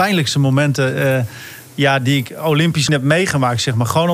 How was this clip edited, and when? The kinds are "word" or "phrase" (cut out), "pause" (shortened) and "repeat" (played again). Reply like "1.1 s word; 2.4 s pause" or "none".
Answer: 2.9 s word

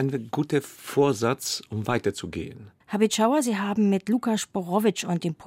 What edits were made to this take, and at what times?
2.8 s pause

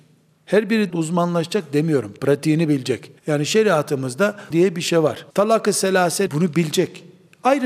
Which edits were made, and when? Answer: 0.9 s word; 3.2 s pause; 4.5 s word; 5.3 s pause; 6.3 s word

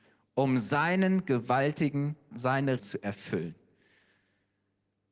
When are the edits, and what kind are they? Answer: 2.3 s word; 2.8 s word

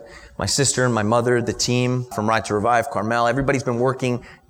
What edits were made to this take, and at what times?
2.1 s word

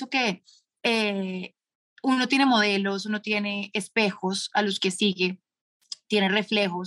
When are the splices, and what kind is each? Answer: none

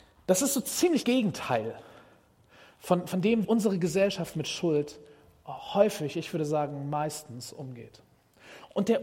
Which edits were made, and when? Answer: 1.0 s word; 3.4 s word

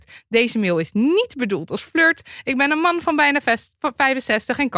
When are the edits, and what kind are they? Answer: none

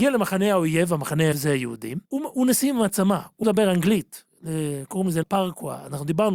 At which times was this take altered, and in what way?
1.3 s word; 2.0 s pause; 3.4 s word; 5.2 s word

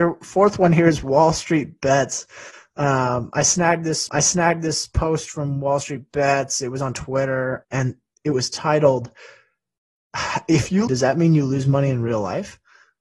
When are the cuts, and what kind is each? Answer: 4.1 s repeat; 7.6 s word; 10.9 s phrase

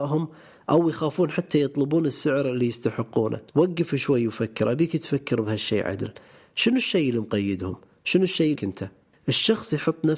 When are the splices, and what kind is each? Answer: 3.5 s pause; 8.6 s word

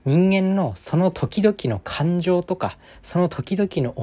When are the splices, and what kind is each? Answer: none

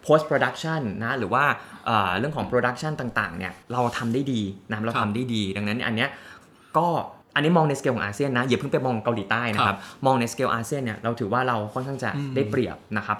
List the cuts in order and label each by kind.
3.6 s pause; 7.2 s pause

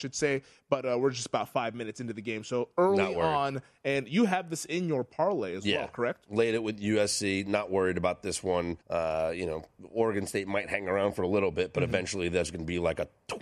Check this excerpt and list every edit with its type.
8.8 s pause

